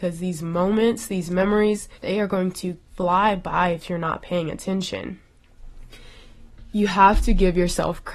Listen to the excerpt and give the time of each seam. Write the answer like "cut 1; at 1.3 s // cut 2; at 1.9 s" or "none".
cut 1; at 1.9 s // cut 2; at 2.9 s